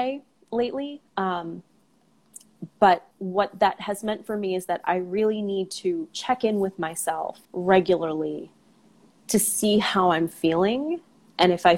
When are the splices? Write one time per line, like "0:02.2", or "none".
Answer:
0:01.1
0:03.1
0:07.4